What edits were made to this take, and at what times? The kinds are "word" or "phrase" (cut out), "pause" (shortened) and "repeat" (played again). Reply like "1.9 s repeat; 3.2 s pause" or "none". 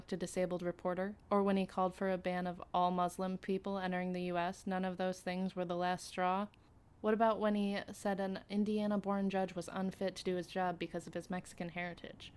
1.2 s pause; 6.7 s pause